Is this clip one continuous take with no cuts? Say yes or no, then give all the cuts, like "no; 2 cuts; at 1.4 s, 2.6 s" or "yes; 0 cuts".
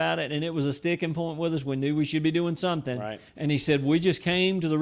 no; 1 cut; at 3.3 s